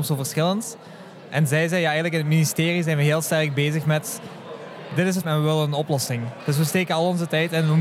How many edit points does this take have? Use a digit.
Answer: 1